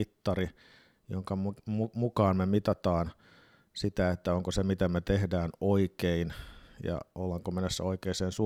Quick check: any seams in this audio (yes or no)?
no